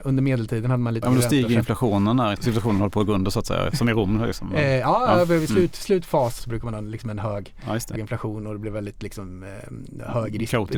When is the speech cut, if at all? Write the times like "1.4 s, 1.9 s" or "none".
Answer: 1.0 s, 2.4 s, 6.4 s, 8.0 s